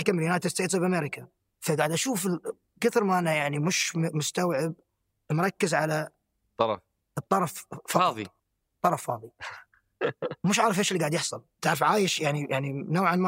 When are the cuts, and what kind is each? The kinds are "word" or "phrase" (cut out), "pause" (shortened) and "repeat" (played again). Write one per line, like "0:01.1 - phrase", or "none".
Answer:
0:01.5 - pause
0:02.8 - word
0:11.5 - pause

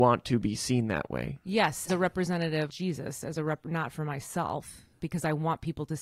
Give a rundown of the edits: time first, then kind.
0:01.9 - word
0:02.7 - word
0:05.0 - word

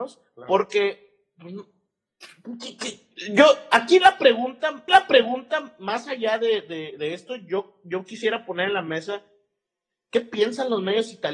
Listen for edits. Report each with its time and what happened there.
0:04.9 - repeat

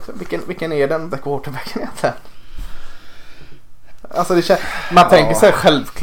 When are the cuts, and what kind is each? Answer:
0:01.1 - word

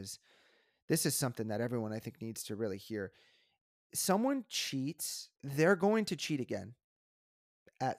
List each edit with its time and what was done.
0:05.4 - pause

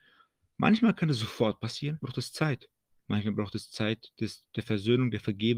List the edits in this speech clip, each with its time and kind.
0:02.0 - word

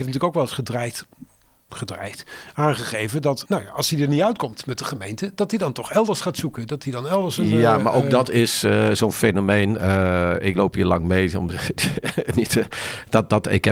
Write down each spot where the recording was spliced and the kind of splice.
0:03.5 - word
0:10.5 - word

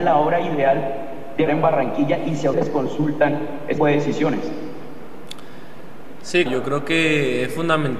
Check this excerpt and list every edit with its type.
0:01.5 - word
0:02.5 - word
0:03.8 - word
0:06.5 - word

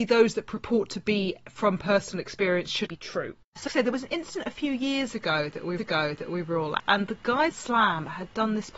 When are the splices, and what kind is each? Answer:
0:02.9 - word
0:03.7 - word
0:05.8 - repeat
0:06.8 - word
0:07.5 - phrase

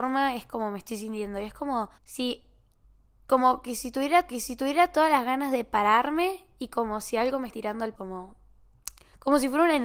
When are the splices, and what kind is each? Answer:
0:02.0 - pause
0:04.3 - repeat
0:07.5 - word
0:08.0 - word

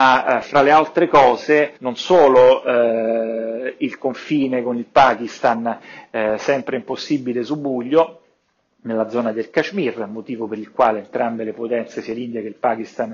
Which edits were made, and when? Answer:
0:01.8 - pause

